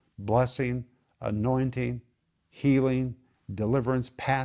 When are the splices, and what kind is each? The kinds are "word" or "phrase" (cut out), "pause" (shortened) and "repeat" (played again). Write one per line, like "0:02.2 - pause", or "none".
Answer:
none